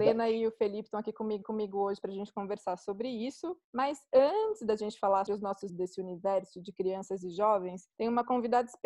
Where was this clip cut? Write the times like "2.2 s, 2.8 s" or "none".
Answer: 1.4 s, 3.6 s, 5.3 s, 5.7 s, 7.9 s